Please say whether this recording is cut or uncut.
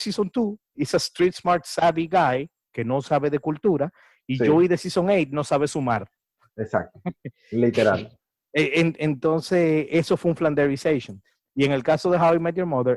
uncut